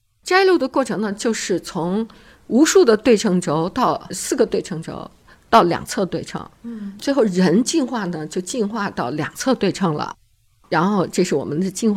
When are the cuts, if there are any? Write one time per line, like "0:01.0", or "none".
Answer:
none